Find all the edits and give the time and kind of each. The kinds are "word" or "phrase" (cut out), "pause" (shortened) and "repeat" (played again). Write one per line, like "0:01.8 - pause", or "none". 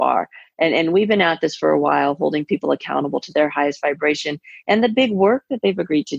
none